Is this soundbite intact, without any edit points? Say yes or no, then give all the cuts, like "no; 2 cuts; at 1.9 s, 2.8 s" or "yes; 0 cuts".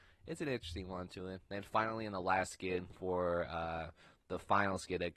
yes; 0 cuts